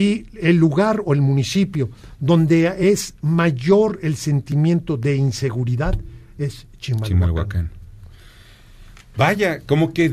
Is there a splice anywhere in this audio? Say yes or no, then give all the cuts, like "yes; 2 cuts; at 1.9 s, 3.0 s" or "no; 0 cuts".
no; 0 cuts